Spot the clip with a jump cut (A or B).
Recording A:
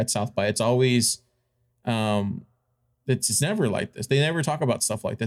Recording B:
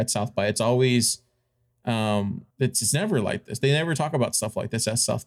B